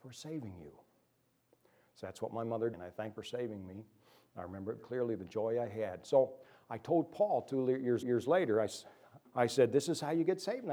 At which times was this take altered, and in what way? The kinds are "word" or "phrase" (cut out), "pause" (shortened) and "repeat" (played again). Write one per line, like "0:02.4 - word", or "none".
0:02.7 - phrase
0:03.2 - phrase
0:04.8 - word
0:08.0 - repeat
0:09.3 - word

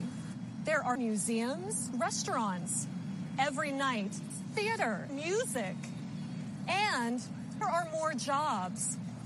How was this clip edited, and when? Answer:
0:01.0 - word
0:01.9 - word
0:04.3 - word
0:05.1 - word
0:07.6 - word

